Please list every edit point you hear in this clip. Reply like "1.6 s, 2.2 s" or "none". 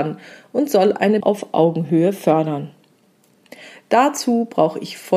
1.2 s